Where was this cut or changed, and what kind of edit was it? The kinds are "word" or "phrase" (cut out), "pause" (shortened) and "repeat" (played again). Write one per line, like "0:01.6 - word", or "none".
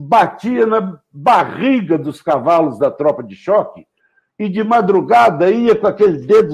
none